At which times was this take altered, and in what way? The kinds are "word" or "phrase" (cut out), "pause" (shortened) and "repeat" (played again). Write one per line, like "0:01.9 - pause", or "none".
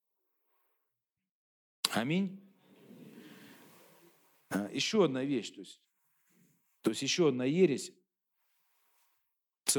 none